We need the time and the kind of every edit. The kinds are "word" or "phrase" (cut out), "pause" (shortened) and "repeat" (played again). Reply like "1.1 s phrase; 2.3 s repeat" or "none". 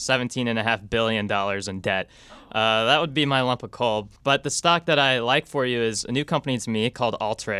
4.2 s pause